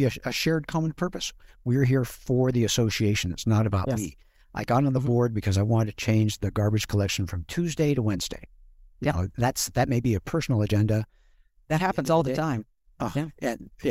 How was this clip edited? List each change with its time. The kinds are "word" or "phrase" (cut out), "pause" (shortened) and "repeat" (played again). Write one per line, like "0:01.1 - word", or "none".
none